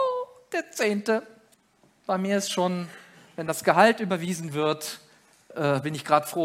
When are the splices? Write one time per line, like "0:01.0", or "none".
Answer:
0:01.5